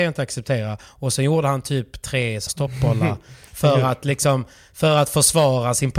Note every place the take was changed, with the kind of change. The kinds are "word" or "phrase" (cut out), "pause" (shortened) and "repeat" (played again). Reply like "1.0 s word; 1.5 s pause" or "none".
2.5 s phrase